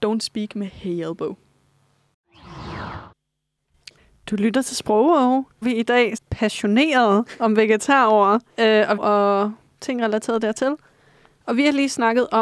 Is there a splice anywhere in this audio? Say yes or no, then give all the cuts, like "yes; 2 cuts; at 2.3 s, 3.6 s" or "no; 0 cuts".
yes; 5 cuts; at 4.0 s, 5.6 s, 6.2 s, 8.5 s, 9.0 s